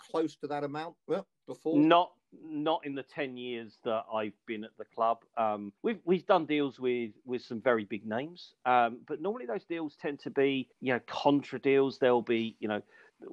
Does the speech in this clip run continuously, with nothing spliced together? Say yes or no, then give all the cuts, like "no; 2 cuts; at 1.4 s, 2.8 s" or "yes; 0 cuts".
no; 2 cuts; at 5.8 s, 10.7 s